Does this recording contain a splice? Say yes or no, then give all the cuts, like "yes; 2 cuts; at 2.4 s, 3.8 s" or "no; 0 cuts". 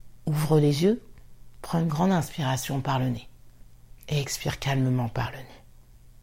yes; 1 cut; at 4.0 s